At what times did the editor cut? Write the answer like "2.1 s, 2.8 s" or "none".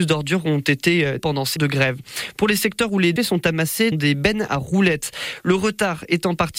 1.2 s, 1.6 s, 3.2 s, 3.9 s